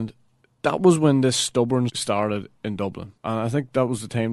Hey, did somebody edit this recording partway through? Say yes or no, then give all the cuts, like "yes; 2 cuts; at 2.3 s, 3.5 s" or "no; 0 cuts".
yes; 2 cuts; at 1.9 s, 3.2 s